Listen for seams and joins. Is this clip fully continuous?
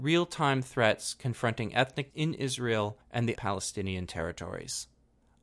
no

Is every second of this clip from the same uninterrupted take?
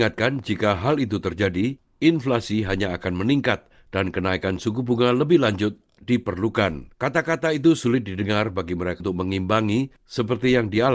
no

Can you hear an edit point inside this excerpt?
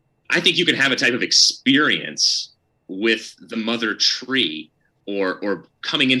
no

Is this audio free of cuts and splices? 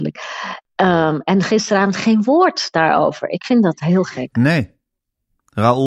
yes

